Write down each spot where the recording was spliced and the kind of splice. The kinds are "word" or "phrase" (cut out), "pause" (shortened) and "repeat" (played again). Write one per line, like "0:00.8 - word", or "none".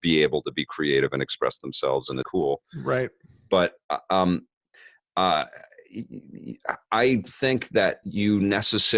0:02.2 - phrase
0:07.2 - word